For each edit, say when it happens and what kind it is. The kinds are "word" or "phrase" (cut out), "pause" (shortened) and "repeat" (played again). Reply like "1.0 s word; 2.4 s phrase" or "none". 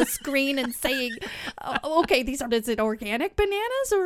2.5 s phrase